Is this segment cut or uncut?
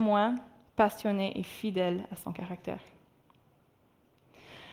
uncut